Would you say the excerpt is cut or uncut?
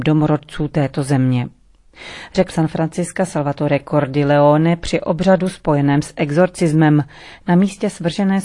cut